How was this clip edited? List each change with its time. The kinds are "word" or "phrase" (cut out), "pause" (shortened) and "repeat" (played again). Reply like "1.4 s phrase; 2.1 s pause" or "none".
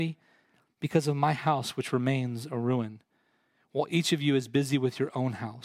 none